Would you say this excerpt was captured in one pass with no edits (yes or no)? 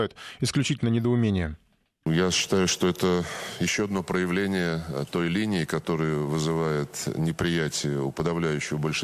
yes